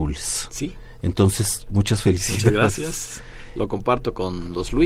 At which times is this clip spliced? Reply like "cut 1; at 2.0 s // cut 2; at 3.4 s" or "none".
none